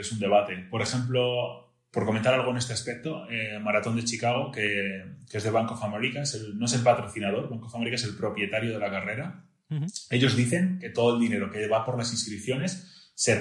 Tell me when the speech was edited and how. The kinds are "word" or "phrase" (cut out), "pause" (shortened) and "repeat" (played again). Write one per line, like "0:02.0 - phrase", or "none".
none